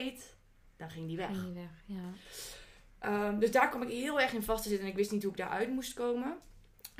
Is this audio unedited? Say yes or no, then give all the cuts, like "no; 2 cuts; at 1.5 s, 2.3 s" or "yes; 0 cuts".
yes; 0 cuts